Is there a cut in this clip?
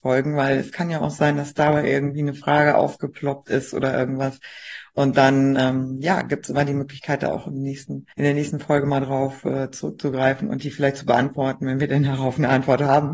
yes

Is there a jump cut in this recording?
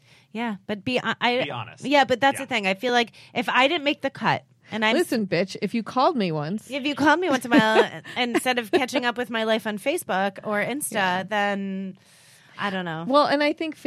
no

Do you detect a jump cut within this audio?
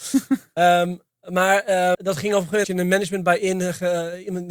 yes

